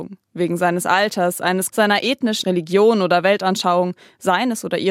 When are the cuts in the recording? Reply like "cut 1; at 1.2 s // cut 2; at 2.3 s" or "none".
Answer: cut 1; at 1.7 s // cut 2; at 2.4 s